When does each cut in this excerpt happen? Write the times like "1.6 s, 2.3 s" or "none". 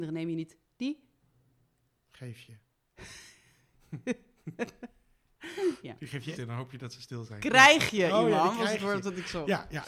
6.4 s

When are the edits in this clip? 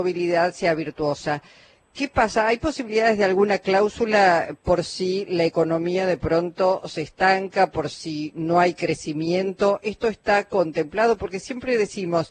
none

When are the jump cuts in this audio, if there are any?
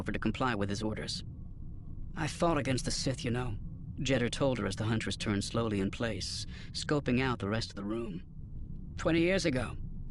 none

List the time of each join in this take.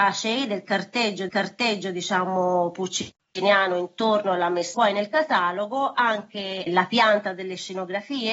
1.3 s, 4.7 s, 6.7 s

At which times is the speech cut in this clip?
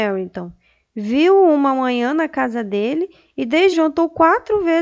3.7 s

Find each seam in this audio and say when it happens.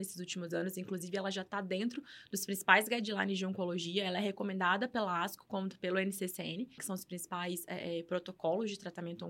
6.8 s

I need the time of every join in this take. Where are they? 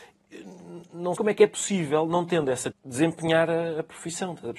1.2 s, 2.7 s

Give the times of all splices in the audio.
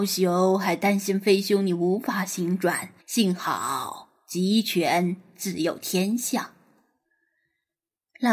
3.0 s

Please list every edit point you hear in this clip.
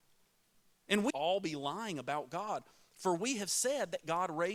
1.1 s

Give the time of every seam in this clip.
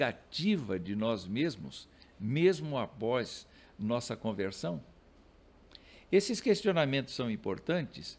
none

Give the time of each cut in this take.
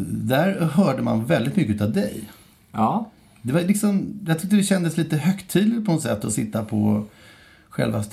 3.2 s

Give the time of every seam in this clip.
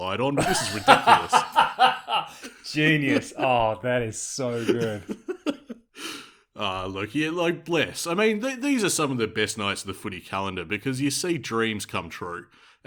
none

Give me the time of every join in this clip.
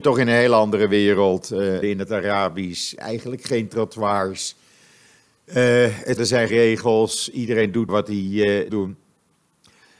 1.8 s, 3.0 s, 6.2 s, 6.5 s, 7.9 s, 8.7 s

